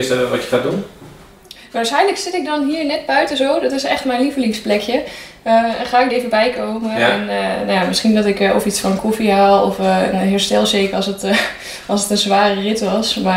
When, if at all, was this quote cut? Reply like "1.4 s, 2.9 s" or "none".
6.1 s